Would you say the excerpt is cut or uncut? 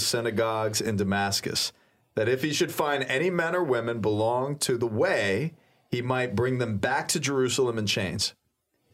uncut